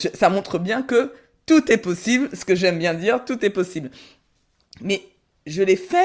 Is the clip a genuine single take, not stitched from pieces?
yes; 0 cuts

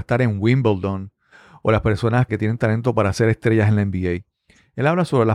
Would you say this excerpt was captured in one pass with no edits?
no; 1 cut; at 2.3 s

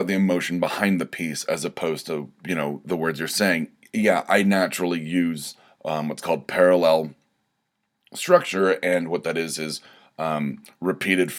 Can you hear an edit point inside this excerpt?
no; 0 cuts

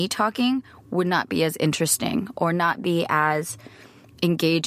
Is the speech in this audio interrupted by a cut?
no; 0 cuts

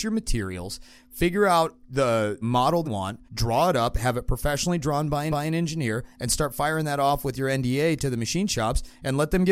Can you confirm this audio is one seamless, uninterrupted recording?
no; 4 cuts; at 2.4 s, 2.8 s, 3.3 s, 5.3 s

